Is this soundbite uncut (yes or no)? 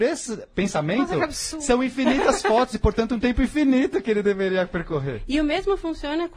yes